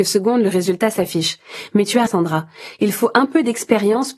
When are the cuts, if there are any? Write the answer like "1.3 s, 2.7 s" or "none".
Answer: 2.1 s